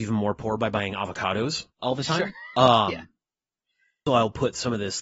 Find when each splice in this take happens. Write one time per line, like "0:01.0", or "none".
0:01.7
0:04.1